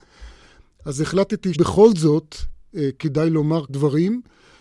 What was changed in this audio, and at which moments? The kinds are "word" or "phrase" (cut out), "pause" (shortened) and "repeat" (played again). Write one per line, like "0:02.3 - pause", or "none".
0:01.5 - word
0:03.7 - word